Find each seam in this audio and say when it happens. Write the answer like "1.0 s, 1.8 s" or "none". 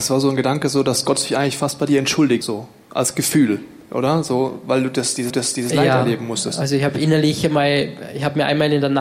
2.4 s, 5.3 s

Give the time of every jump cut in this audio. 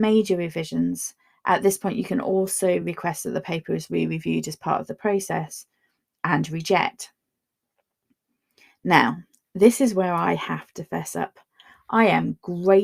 none

